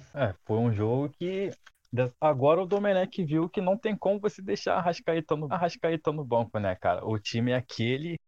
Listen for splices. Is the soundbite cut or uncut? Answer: cut